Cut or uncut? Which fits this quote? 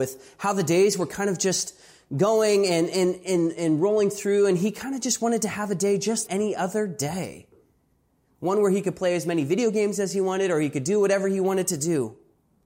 cut